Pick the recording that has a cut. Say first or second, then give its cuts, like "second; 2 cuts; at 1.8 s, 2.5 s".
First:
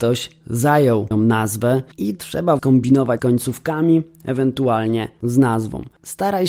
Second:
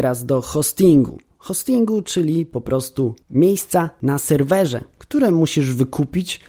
first; 4 cuts; at 1.1 s, 1.9 s, 2.6 s, 3.2 s